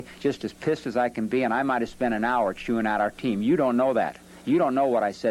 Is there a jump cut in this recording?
no; 0 cuts

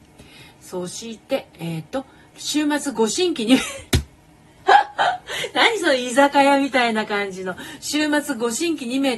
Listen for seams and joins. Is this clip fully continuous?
yes; 0 cuts

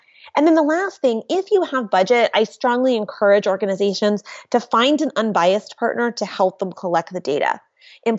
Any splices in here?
no; 0 cuts

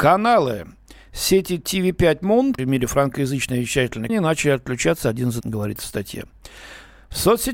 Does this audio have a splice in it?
yes; 3 cuts; at 2.6 s, 4.1 s, 5.4 s

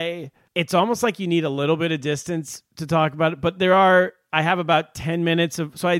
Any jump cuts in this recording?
no; 0 cuts

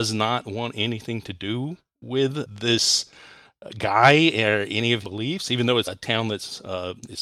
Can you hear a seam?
yes; 2 cuts; at 5.0 s, 5.8 s

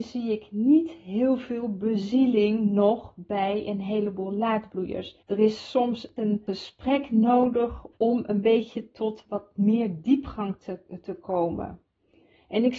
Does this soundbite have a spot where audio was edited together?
yes; 2 cuts; at 5.2 s, 7.9 s

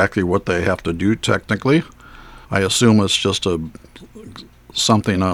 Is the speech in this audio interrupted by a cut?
yes; 1 cut; at 2.4 s

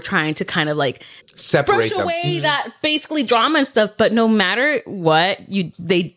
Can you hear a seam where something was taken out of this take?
yes; 1 cut; at 1.2 s

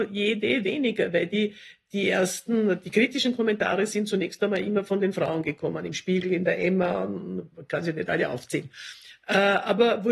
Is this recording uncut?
yes; 0 cuts

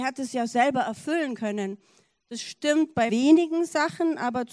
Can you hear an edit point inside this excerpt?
yes; 1 cut; at 3.1 s

